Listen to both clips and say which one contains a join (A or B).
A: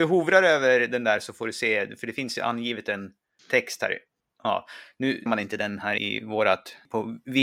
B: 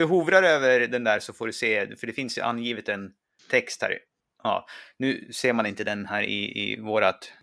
A